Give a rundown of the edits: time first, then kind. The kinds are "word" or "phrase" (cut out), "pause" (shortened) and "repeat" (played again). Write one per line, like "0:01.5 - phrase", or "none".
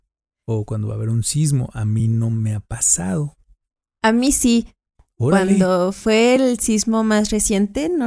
none